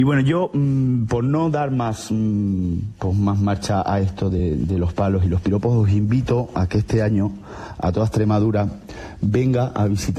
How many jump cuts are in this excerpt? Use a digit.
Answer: 0